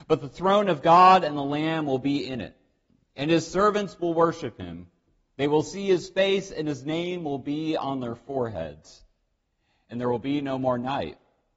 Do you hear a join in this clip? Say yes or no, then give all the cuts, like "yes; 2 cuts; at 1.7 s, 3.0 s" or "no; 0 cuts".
no; 0 cuts